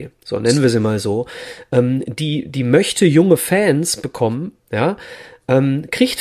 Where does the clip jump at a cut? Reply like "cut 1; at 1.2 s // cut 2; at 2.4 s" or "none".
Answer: none